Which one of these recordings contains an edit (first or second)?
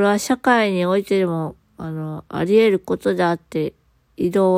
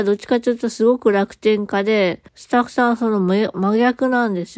second